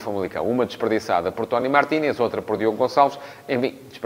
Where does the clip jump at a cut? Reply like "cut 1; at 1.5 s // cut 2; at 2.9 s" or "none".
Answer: none